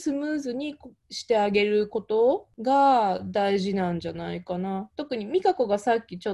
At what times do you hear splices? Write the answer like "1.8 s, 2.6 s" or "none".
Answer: 2.5 s